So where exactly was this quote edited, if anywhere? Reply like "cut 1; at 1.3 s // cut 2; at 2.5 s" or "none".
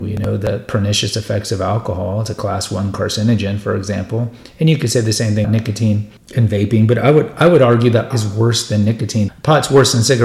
cut 1; at 5.4 s // cut 2; at 6.2 s // cut 3; at 8.1 s // cut 4; at 9.3 s